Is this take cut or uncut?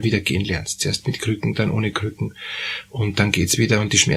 uncut